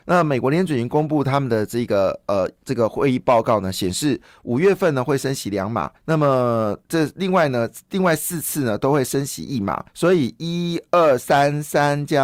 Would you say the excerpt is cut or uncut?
cut